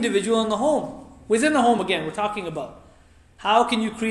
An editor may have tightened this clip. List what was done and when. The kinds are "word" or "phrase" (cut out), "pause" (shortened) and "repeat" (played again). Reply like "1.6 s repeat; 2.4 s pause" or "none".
none